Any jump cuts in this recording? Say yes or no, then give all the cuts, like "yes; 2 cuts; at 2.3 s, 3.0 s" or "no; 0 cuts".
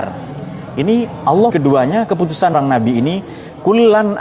yes; 2 cuts; at 1.5 s, 2.5 s